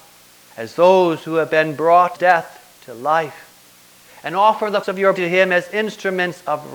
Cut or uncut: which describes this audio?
cut